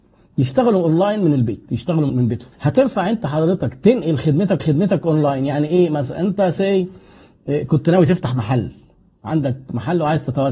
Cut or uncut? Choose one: cut